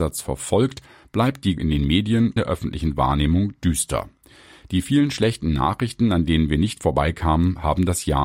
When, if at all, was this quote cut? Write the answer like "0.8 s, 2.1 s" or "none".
1.6 s, 2.4 s

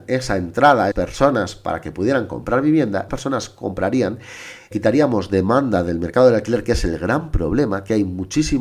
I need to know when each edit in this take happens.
0.9 s, 3.1 s, 4.7 s

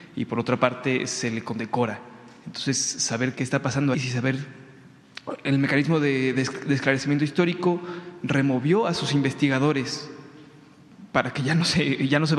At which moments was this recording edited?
3.4 s, 3.9 s

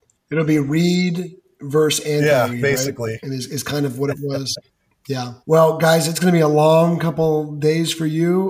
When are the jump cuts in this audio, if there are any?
4.7 s, 5.4 s

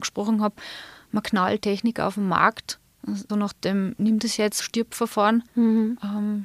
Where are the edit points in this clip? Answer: 1.6 s, 3.3 s, 4.6 s, 5.5 s

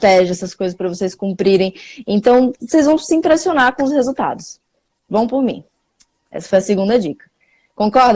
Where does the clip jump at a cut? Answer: none

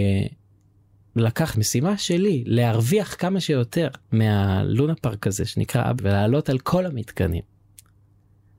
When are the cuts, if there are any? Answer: 1.5 s, 4.0 s, 6.0 s

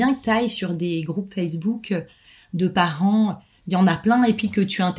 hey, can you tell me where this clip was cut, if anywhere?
none

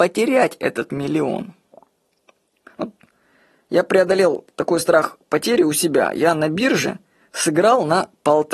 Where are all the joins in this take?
none

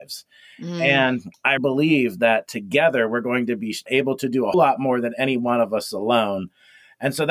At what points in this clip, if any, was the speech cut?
1.6 s, 3.9 s, 4.5 s

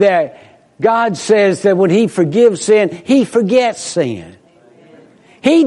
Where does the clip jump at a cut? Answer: none

